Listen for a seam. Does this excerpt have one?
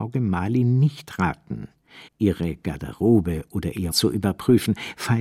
yes; 2 cuts; at 2.1 s, 3.9 s

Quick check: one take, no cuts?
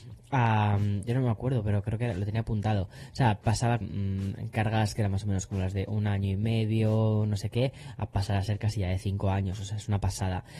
no; 1 cut; at 3.8 s

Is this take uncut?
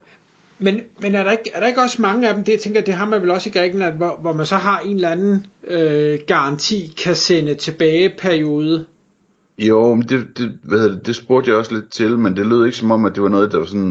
yes; 0 cuts

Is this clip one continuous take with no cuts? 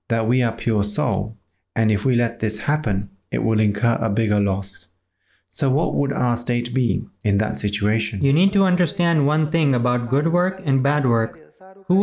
yes; 0 cuts

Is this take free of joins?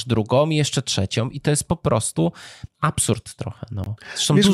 no; 1 cut; at 2.7 s

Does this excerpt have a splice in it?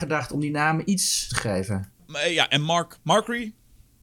yes; 1 cut; at 1.3 s

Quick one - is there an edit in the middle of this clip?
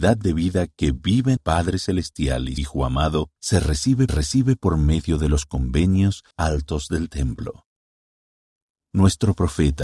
yes; 5 cuts; at 1.4 s, 2.6 s, 3.4 s, 4.1 s, 6.3 s

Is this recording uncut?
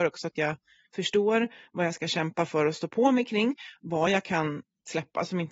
yes; 0 cuts

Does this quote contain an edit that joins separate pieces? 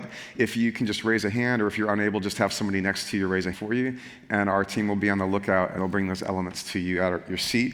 yes; 2 cuts; at 3.5 s, 5.8 s

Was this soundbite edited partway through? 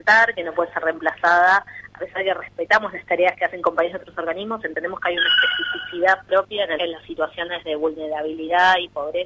yes; 1 cut; at 6.8 s

